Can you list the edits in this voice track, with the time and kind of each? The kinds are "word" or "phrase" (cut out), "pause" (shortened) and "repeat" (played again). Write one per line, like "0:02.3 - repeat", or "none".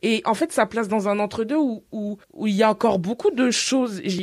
0:02.2 - pause